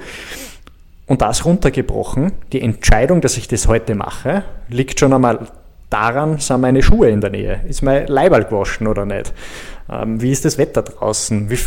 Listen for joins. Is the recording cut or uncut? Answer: uncut